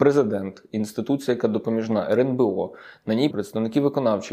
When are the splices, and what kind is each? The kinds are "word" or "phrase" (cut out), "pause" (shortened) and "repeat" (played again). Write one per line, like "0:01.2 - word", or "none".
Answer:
0:03.3 - word